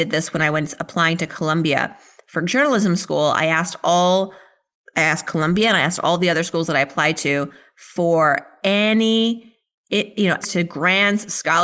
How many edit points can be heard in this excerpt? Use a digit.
1